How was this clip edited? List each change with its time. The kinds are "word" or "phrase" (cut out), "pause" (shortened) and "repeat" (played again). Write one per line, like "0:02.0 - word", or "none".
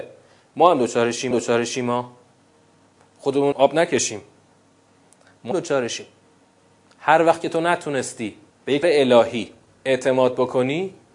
0:01.3 - repeat
0:03.5 - word
0:05.5 - word
0:08.5 - pause
0:08.8 - word